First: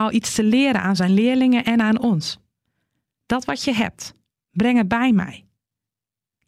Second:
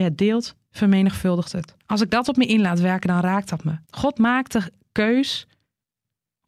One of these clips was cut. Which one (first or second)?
second